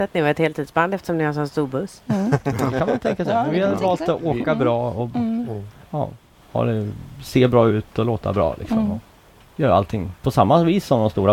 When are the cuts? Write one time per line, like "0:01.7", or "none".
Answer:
none